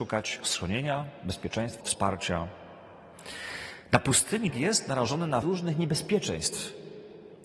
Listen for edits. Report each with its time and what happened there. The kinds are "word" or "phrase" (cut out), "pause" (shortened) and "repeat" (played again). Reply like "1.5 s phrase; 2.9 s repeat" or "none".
1.8 s word; 4.5 s word; 5.4 s word